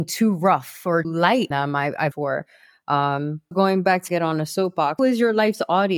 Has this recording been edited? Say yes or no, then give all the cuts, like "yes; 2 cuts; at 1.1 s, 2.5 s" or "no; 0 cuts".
yes; 6 cuts; at 1.0 s, 1.5 s, 2.1 s, 3.5 s, 4.1 s, 5.0 s